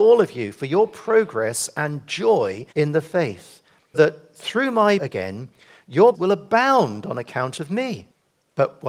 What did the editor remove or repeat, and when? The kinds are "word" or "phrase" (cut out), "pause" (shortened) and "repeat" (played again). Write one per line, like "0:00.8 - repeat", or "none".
0:02.7 - pause
0:03.9 - word
0:05.0 - phrase
0:06.1 - phrase